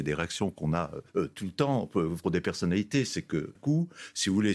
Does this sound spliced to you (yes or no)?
yes